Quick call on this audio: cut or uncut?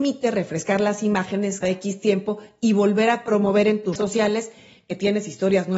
cut